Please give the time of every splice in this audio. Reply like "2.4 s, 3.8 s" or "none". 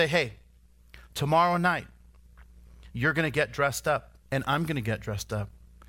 2.9 s, 4.2 s